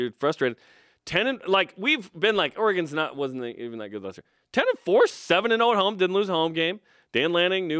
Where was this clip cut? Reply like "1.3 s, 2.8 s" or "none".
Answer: 5.1 s